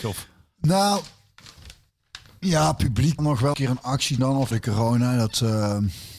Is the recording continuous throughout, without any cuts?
no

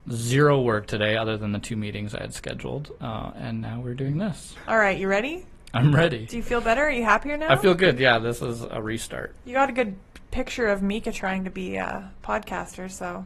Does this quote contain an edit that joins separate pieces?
no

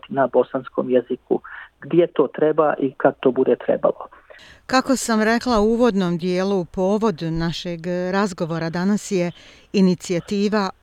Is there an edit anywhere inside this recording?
no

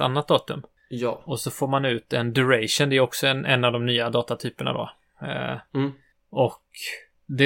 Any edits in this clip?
no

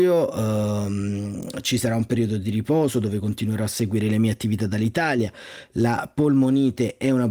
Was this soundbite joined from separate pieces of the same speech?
no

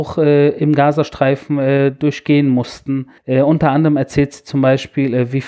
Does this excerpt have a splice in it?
yes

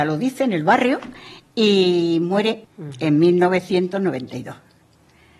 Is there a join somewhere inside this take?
yes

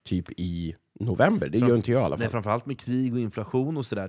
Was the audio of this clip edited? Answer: no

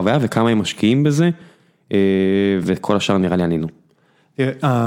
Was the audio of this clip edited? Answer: no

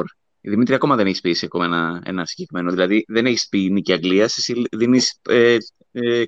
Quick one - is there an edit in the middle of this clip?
no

